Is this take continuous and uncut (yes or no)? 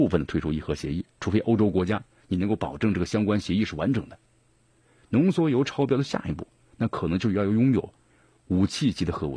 yes